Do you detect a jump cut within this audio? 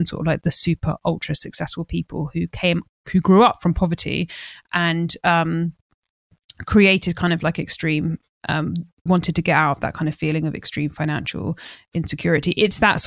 yes; 1 cut; at 9.1 s

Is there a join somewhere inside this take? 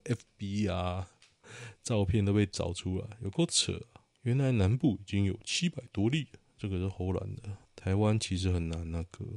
yes; 2 cuts; at 4.1 s, 7.6 s

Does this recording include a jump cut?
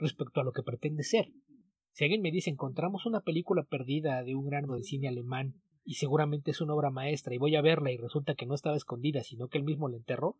yes; 1 cut; at 4.7 s

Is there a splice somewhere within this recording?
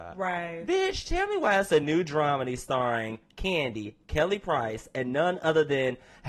no; 0 cuts

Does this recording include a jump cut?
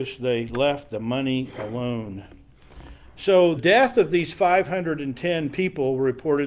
yes; 1 cut; at 3.6 s

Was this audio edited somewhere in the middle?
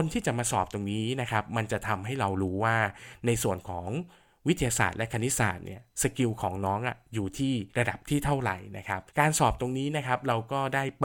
yes; 2 cuts; at 7.7 s, 9.1 s

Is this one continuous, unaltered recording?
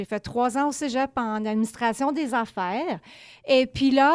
yes; 0 cuts

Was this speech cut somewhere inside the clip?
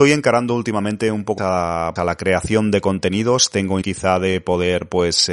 yes; 3 cuts; at 1.4 s, 2.0 s, 3.8 s

